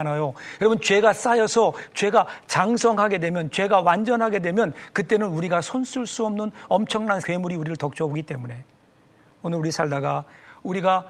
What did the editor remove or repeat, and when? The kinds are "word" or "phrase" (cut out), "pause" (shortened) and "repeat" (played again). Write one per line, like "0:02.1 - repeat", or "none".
0:07.2 - word